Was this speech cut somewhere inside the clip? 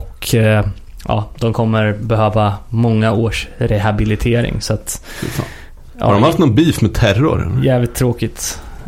no; 0 cuts

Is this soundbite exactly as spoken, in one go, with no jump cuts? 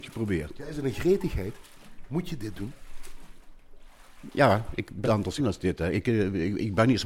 no; 2 cuts; at 5.0 s, 5.4 s

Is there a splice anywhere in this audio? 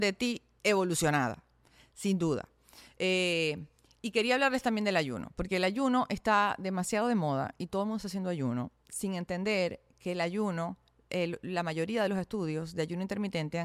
no; 0 cuts

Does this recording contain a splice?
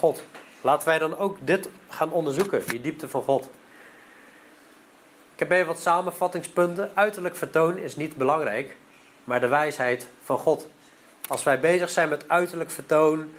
no; 0 cuts

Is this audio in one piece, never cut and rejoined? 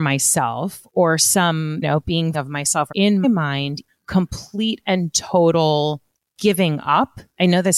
no; 5 cuts; at 1.8 s, 2.3 s, 2.9 s, 3.2 s, 3.9 s

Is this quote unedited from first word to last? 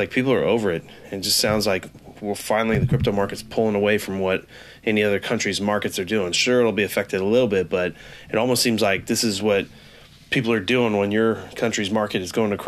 yes; 0 cuts

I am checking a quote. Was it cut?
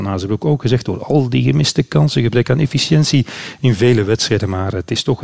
no; 0 cuts

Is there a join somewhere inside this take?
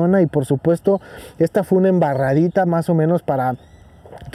no; 0 cuts

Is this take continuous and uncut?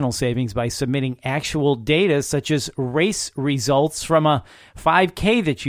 yes; 0 cuts

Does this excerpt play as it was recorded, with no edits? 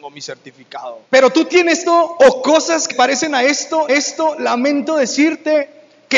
no; 4 cuts; at 1.1 s, 1.9 s, 2.9 s, 3.9 s

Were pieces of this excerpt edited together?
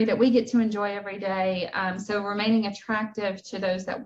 no; 0 cuts

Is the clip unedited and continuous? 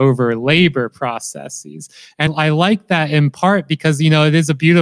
no; 1 cut; at 2.3 s

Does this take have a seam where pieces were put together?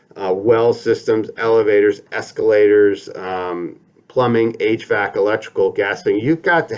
no; 0 cuts

